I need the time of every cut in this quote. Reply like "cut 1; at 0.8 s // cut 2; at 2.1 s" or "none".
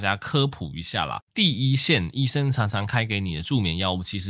cut 1; at 1.2 s